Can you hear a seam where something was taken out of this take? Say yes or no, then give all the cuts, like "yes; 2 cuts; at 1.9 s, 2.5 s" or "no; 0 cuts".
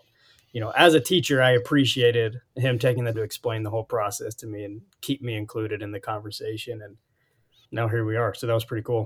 yes; 2 cuts; at 3.1 s, 7.6 s